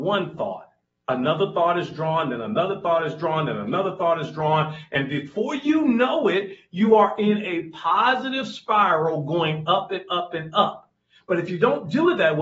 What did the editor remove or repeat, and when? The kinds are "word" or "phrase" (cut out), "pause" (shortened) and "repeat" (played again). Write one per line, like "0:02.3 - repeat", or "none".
none